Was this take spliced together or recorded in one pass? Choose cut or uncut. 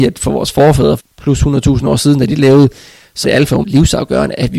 cut